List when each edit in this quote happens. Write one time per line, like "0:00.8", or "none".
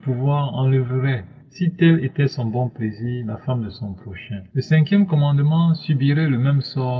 0:01.4
0:04.5